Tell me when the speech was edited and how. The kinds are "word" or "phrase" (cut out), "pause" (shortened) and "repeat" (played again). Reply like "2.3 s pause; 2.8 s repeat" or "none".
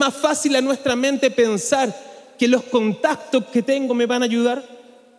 none

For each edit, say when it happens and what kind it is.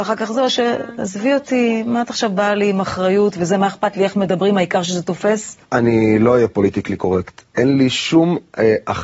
5.6 s pause

